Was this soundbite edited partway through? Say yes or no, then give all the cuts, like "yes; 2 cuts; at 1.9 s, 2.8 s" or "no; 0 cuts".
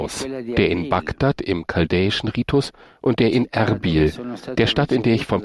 no; 0 cuts